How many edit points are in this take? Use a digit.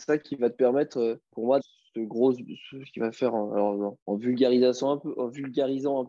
3